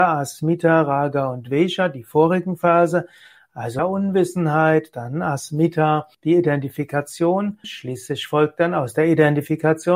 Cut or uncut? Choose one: cut